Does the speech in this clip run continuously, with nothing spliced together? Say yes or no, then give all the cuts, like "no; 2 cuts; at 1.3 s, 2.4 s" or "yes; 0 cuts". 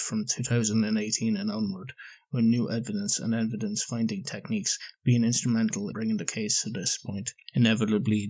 no; 1 cut; at 5.9 s